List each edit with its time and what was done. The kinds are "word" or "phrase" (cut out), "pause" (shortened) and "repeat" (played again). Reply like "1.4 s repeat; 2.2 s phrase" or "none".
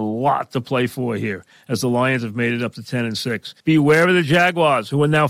3.6 s pause

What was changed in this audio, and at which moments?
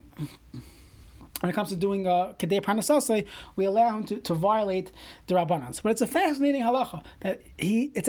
1.3 s pause

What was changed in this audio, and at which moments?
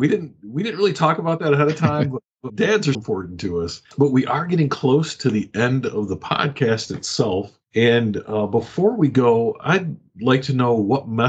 2.5 s word; 2.9 s word; 3.9 s pause; 7.6 s pause

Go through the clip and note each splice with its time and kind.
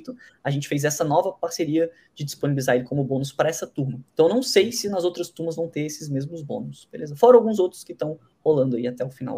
4.1 s pause

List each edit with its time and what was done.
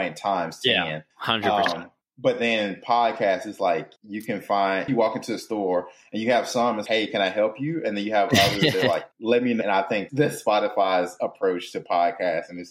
1.1 s pause; 2.0 s pause; 4.0 s pause; 4.9 s phrase; 6.9 s word; 9.1 s pause; 9.6 s phrase; 10.1 s word

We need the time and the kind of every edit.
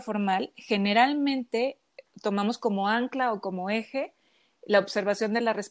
none

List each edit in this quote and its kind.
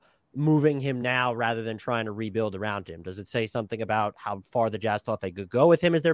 none

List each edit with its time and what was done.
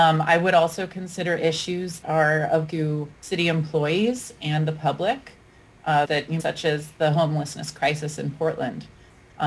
2.0 s word; 2.7 s word; 3.1 s pause; 6.0 s phrase; 6.4 s word

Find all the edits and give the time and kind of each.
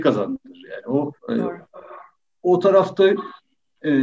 1.2 s pause

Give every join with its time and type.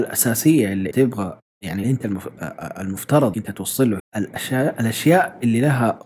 0.9 s word; 1.8 s word; 3.3 s word; 4.0 s word

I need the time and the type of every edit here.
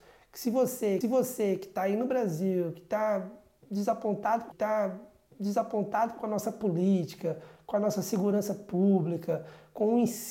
1.0 s repeat; 4.5 s repeat

